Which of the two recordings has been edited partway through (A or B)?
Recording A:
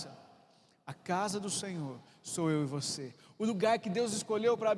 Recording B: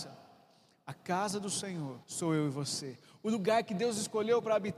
B